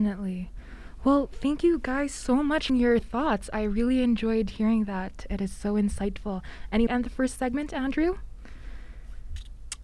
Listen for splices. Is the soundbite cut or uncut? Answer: cut